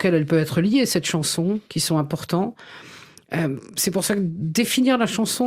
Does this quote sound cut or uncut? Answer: uncut